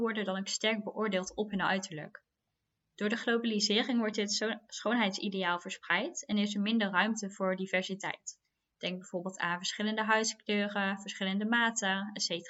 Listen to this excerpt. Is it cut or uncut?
uncut